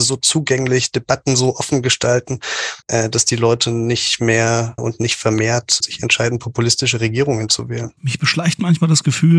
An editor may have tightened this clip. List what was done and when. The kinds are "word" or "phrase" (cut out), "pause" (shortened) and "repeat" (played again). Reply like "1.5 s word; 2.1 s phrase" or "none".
2.8 s pause; 4.8 s word; 5.8 s word; 8.0 s pause